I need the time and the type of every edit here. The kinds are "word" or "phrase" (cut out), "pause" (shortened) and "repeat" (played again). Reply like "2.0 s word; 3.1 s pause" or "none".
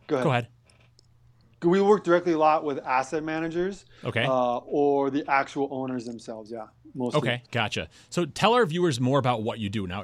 7.5 s pause

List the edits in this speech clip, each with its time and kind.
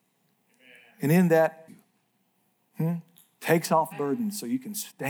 1.7 s phrase; 3.9 s word

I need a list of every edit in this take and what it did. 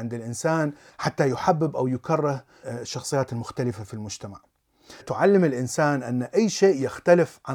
2.6 s word; 5.0 s word

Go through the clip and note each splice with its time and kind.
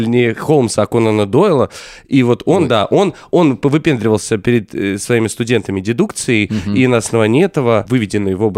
none

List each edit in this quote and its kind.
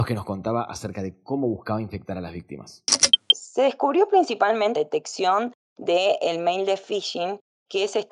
4.8 s phrase

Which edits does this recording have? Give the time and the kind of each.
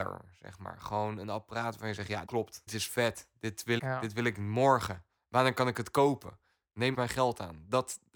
2.3 s word; 2.7 s word; 3.8 s word; 6.9 s word

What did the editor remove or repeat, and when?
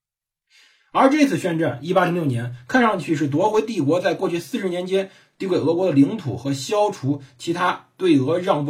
none

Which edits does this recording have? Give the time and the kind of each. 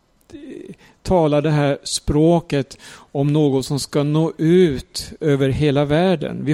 none

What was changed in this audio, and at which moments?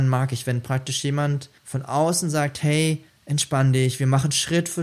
1.6 s pause; 3.1 s pause

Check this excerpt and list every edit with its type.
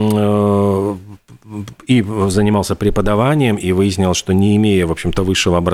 none

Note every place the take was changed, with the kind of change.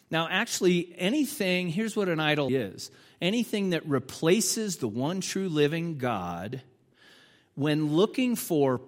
2.5 s word

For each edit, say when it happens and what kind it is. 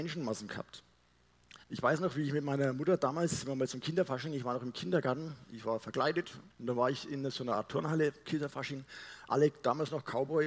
1.6 s pause; 6.5 s pause

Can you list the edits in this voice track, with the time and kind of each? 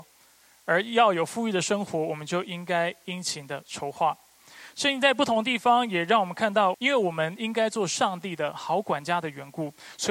6.7 s phrase

